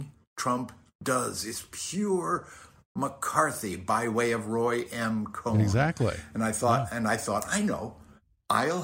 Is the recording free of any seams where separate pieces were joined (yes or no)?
yes